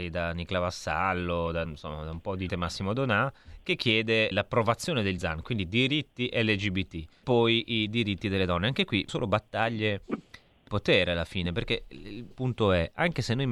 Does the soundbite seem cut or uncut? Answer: cut